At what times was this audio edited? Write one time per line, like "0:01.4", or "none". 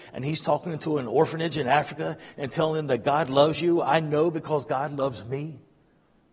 none